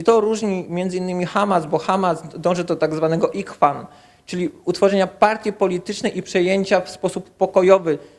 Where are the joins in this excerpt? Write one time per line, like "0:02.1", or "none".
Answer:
none